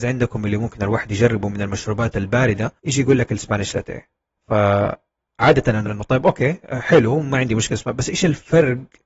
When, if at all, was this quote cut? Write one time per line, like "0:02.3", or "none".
0:02.8
0:05.9